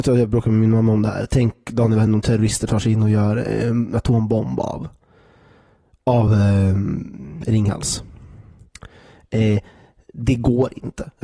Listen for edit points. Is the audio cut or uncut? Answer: uncut